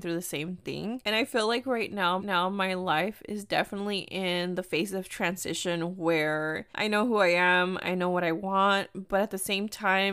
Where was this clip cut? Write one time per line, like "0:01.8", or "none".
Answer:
0:02.2
0:06.7

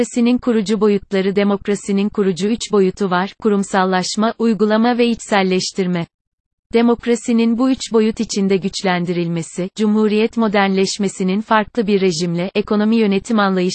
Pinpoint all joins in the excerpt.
none

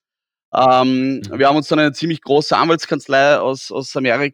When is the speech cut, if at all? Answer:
none

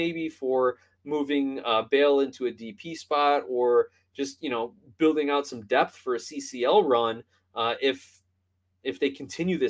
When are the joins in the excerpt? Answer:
none

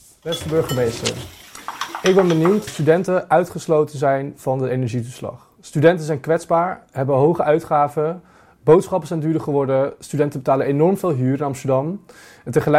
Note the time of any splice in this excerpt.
0:02.7

